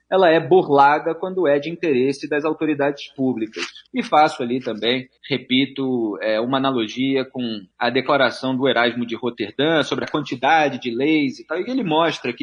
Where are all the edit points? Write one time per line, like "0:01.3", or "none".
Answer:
0:03.9
0:05.2
0:07.7